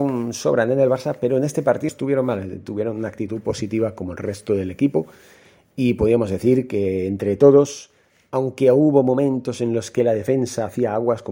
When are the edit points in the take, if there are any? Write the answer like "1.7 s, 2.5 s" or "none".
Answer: 1.9 s